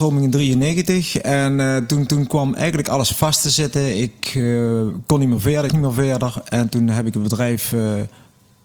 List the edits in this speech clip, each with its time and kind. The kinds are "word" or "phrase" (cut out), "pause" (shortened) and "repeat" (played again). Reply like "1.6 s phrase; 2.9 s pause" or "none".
2.1 s repeat; 5.7 s word